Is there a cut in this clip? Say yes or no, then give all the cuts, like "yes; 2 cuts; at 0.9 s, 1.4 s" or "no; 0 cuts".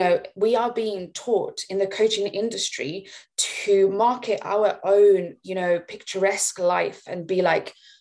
no; 0 cuts